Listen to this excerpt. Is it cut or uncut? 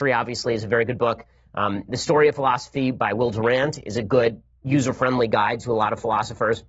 uncut